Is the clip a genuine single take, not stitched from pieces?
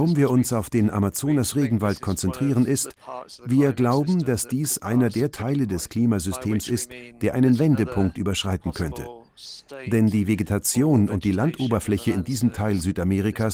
yes; 0 cuts

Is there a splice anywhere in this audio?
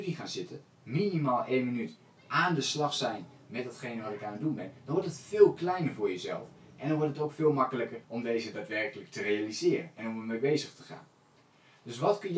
yes; 1 cut; at 8.0 s

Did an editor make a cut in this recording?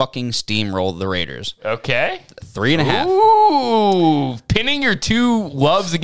no; 0 cuts

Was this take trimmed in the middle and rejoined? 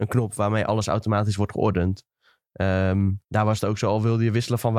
yes; 1 cut; at 3.2 s

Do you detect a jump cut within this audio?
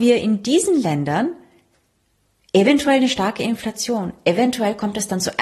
no; 0 cuts

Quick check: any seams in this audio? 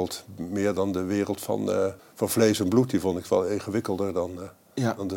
yes; 1 cut; at 2.0 s

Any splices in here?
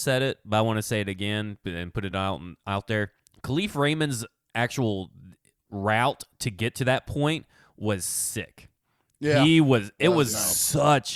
no; 0 cuts

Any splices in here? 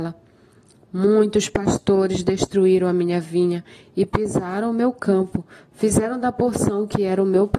no; 0 cuts

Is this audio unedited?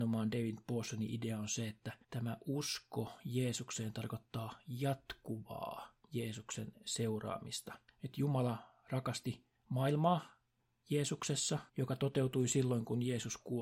no; 4 cuts; at 2.0 s, 6.0 s, 7.9 s, 11.7 s

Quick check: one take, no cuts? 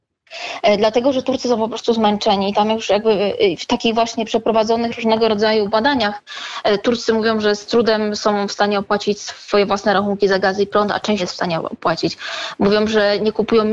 no; 1 cut; at 11.2 s

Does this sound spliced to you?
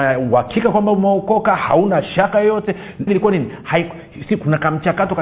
yes; 1 cut; at 3.1 s

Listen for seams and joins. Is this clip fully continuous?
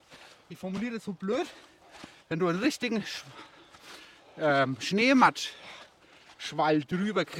yes; 0 cuts

